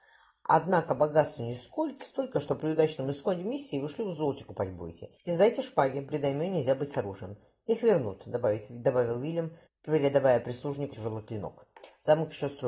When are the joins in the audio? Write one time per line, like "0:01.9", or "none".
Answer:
0:05.2
0:09.7
0:10.9

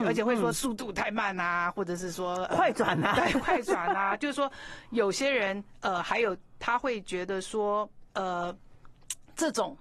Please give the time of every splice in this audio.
none

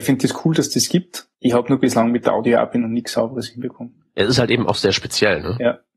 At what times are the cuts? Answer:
0:01.3

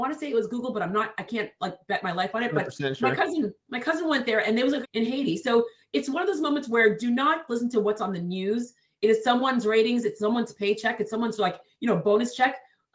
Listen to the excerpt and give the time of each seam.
0:04.8
0:07.5

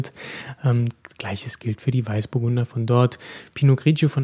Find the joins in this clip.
none

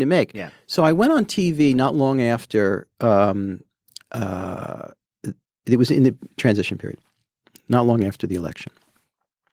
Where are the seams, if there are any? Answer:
none

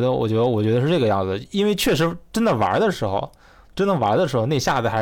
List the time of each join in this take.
none

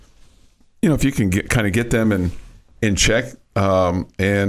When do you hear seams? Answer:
none

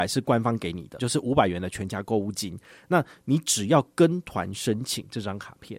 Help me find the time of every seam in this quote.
0:01.0

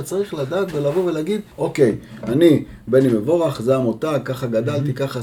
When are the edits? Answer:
0:01.5

